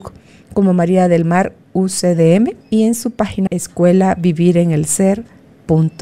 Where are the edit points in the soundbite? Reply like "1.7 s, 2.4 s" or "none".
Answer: 2.6 s, 3.5 s